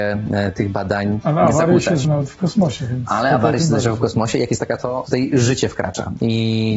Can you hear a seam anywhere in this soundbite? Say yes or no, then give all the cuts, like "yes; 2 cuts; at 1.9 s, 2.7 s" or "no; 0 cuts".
yes; 2 cuts; at 2.0 s, 4.8 s